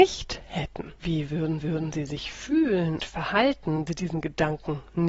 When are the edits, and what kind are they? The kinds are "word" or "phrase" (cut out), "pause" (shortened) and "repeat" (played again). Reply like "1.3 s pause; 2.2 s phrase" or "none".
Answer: 1.0 s pause; 1.6 s repeat; 3.0 s word; 3.9 s word